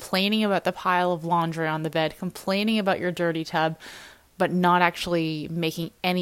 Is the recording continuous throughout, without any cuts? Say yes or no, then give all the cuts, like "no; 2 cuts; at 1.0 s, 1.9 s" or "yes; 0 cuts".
yes; 0 cuts